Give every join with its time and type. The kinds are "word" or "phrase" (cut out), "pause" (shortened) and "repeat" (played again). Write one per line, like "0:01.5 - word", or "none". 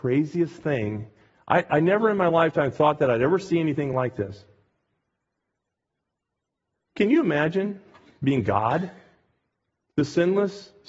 none